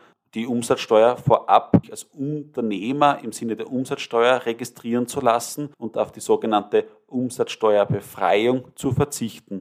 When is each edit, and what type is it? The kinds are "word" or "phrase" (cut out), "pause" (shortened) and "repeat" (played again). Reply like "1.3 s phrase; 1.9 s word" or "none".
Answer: 1.8 s word; 5.7 s pause